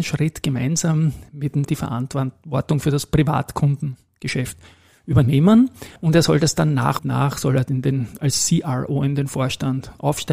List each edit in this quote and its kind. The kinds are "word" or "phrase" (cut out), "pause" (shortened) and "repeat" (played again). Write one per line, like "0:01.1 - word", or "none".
0:01.6 - phrase
0:06.0 - pause
0:07.0 - word